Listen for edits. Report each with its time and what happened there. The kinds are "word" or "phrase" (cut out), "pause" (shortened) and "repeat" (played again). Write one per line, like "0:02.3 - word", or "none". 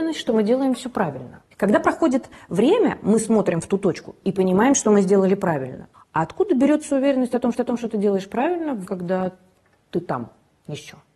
0:01.5 - pause
0:05.9 - pause
0:07.5 - repeat
0:08.9 - word